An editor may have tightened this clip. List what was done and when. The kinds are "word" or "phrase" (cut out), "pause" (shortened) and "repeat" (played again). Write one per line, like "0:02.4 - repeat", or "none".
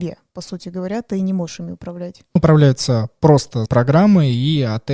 0:02.4 - word
0:03.7 - word